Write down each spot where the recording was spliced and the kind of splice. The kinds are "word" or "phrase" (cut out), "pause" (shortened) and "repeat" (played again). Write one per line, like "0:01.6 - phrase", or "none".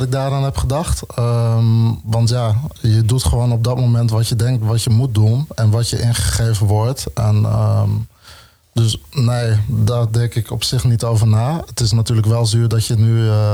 none